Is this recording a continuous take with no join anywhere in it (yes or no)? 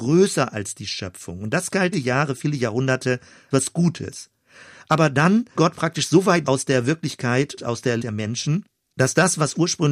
no